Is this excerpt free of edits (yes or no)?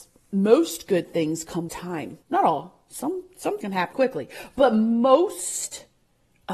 no